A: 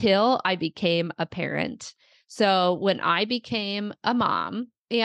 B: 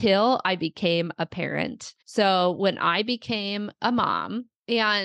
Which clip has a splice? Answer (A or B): B